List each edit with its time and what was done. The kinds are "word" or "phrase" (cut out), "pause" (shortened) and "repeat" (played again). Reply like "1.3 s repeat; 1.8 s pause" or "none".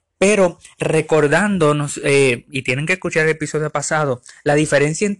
none

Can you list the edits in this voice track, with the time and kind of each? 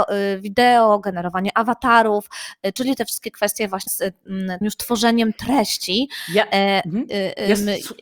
3.9 s word; 4.6 s word

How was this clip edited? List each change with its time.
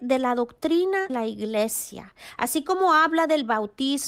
1.1 s word

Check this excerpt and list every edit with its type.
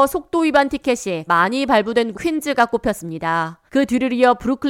1.3 s word; 2.1 s word; 3.7 s pause

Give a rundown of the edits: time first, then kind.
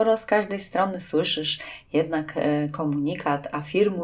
none

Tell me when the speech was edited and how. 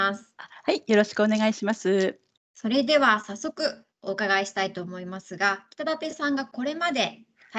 2.4 s pause; 3.9 s pause

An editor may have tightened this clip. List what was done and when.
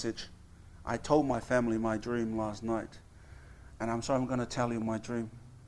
none

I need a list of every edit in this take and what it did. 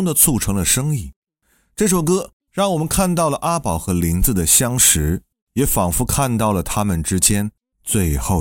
none

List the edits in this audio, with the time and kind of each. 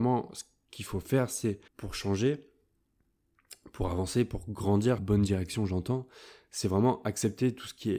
1.7 s pause; 5.0 s phrase

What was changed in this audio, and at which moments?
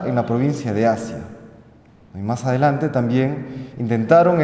none

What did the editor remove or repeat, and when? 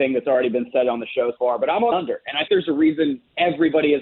1.4 s word; 1.9 s word; 2.5 s word

